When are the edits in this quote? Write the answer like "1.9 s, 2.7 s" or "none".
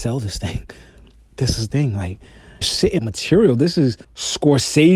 1.7 s, 2.6 s, 3.0 s, 4.0 s